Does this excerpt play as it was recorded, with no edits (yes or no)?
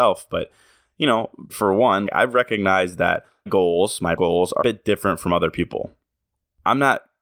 no